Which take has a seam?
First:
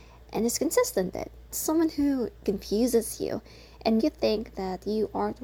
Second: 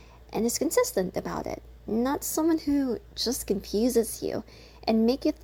first; 4 cuts; at 1.1 s, 1.5 s, 2.4 s, 4.0 s

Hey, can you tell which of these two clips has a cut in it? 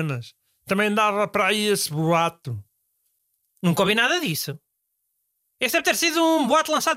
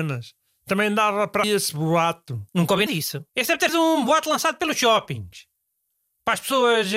second; 5 cuts; at 1.4 s, 2.5 s, 2.9 s, 3.3 s, 3.7 s

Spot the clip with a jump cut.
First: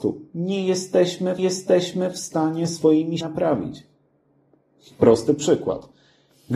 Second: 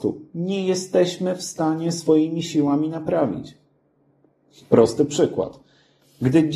first; 2 cuts; at 1.4 s, 3.2 s

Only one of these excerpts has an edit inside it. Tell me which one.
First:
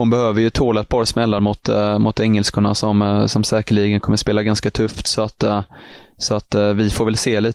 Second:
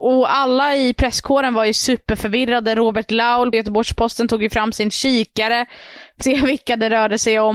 second; 2 cuts; at 3.5 s, 6.2 s

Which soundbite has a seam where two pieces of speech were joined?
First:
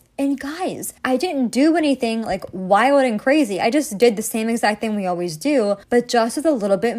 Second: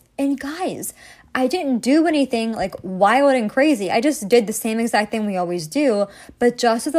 first; 2 cuts; at 1.0 s, 5.8 s

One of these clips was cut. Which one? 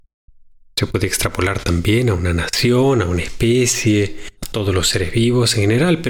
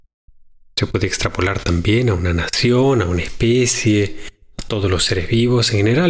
first; 1 cut; at 4.4 s

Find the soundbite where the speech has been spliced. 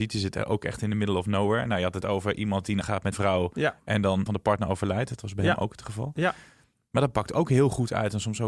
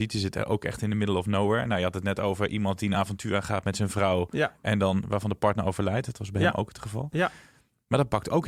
first; 4 cuts; at 2.0 s, 2.8 s, 3.1 s, 4.3 s

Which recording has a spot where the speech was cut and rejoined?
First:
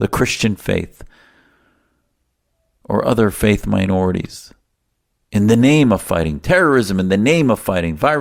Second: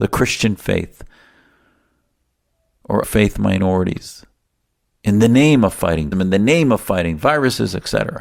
second; 2 cuts; at 3.0 s, 6.1 s

